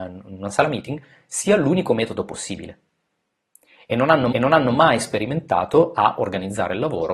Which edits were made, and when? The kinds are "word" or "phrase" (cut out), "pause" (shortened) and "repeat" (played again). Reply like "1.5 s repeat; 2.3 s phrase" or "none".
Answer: 4.3 s repeat